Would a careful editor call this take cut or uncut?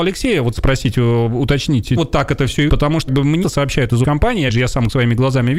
cut